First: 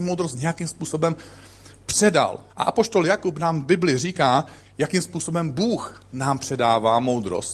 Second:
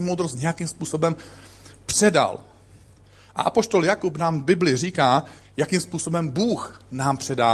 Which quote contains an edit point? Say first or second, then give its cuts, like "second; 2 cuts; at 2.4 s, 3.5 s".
first; 1 cut; at 2.5 s